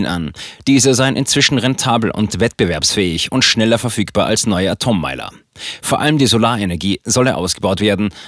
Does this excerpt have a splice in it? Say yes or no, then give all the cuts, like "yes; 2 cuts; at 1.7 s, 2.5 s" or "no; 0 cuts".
no; 0 cuts